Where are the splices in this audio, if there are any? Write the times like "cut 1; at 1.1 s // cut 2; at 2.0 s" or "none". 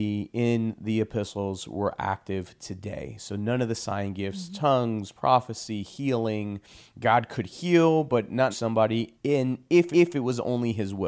cut 1; at 8.5 s // cut 2; at 9.2 s // cut 3; at 9.9 s

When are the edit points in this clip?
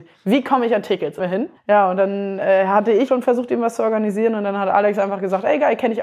cut 1; at 1.2 s // cut 2; at 1.6 s // cut 3; at 3.1 s

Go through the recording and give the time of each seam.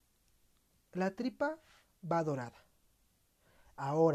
none

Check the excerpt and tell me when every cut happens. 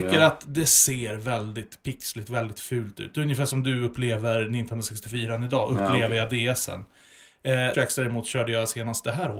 cut 1; at 7.7 s

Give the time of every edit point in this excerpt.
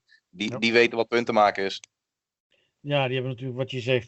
none

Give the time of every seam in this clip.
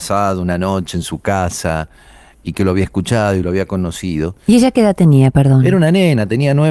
none

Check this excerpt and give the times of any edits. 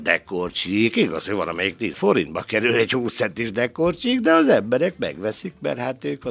cut 1; at 1.9 s

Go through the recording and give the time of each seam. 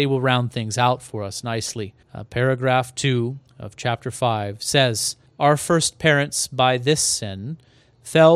cut 1; at 2.0 s // cut 2; at 3.5 s // cut 3; at 5.3 s

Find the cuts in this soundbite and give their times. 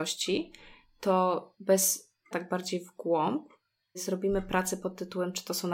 cut 1; at 2.3 s // cut 2; at 3.9 s

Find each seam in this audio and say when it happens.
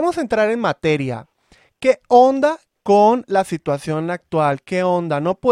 none

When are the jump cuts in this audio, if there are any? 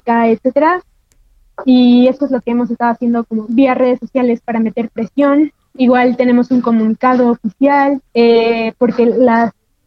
cut 1; at 8.1 s

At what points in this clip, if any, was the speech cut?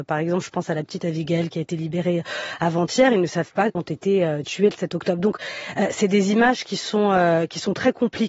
cut 1; at 3.7 s

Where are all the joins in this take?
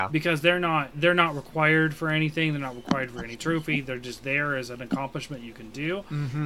none

